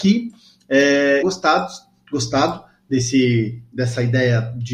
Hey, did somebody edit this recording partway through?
yes; 1 cut; at 1.2 s

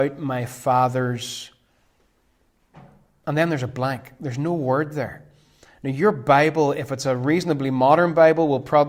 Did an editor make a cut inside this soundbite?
no; 0 cuts

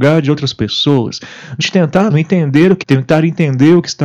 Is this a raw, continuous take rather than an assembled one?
no; 3 cuts; at 1.6 s, 2.1 s, 2.8 s

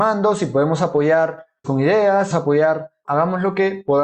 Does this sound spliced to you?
yes; 3 cuts; at 1.6 s, 2.3 s, 3.0 s

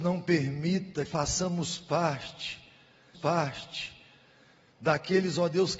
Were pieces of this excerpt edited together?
yes; 2 cuts; at 1.1 s, 3.1 s

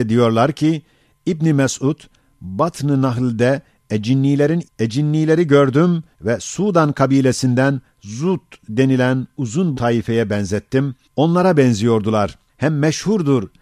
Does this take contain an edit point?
yes; 5 cuts; at 4.6 s, 6.1 s, 9.7 s, 11.0 s, 12.5 s

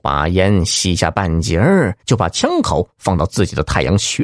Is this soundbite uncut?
no; 1 cut; at 2.0 s

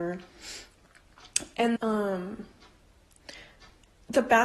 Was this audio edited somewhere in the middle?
yes; 1 cut; at 1.8 s

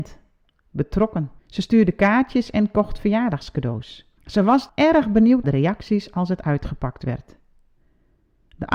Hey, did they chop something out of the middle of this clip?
yes; 4 cuts; at 1.4 s, 4.2 s, 4.7 s, 5.4 s

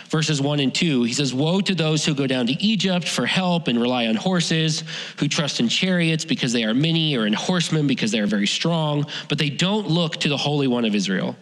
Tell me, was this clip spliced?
no; 0 cuts

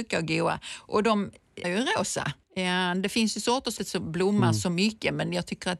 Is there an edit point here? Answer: yes; 3 cuts; at 1.6 s, 2.4 s, 3.8 s

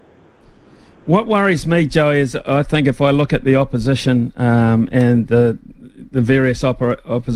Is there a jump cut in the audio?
no; 0 cuts

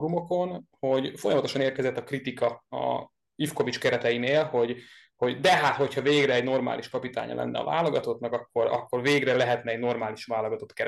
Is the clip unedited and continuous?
yes; 0 cuts

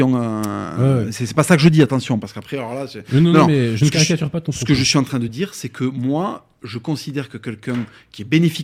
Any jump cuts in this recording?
no; 0 cuts

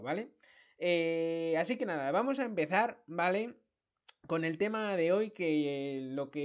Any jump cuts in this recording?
no; 0 cuts

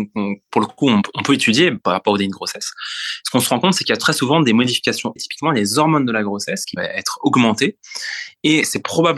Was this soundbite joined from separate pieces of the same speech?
yes; 2 cuts; at 5.2 s, 6.8 s

